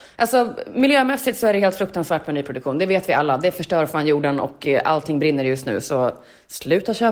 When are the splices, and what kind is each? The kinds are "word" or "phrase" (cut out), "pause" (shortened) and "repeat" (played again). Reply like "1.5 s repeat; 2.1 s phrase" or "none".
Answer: none